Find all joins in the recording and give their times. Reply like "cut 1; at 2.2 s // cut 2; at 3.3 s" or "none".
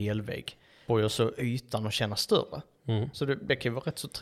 none